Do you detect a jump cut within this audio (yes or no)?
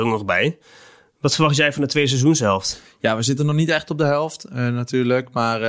no